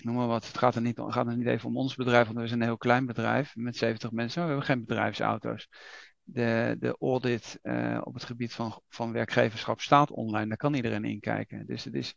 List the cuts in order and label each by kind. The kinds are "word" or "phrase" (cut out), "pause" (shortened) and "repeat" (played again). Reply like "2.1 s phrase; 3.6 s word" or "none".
none